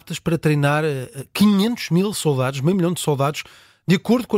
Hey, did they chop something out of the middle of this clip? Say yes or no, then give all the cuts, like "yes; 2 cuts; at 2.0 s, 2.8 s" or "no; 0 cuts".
no; 0 cuts